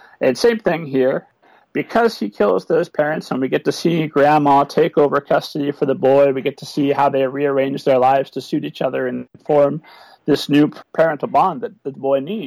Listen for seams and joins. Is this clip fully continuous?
yes; 0 cuts

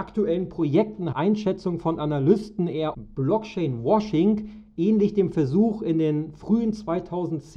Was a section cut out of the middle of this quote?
yes; 2 cuts; at 1.1 s, 2.9 s

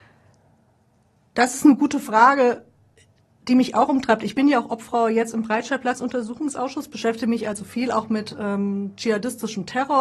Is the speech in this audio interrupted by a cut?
no; 0 cuts

